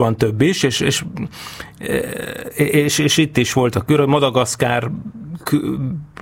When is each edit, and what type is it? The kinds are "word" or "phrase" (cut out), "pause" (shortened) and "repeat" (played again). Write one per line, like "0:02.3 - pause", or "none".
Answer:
none